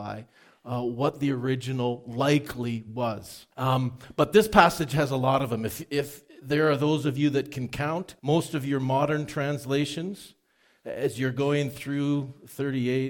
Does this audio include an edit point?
yes; 2 cuts; at 3.5 s, 8.2 s

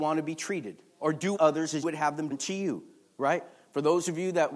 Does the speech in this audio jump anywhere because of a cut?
yes; 3 cuts; at 1.4 s, 1.8 s, 2.3 s

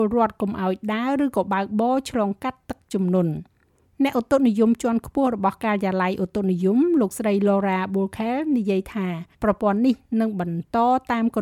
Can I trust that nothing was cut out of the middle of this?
no; 1 cut; at 9.3 s

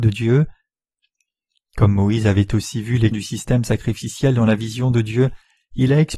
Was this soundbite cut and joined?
yes; 1 cut; at 3.1 s

